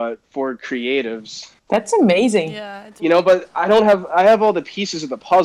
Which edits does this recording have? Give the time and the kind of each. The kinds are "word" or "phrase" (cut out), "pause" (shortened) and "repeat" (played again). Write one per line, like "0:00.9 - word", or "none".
0:01.6 - pause
0:03.0 - phrase